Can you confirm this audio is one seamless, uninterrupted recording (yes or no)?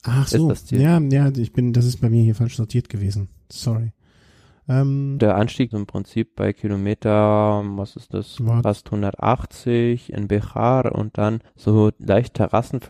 no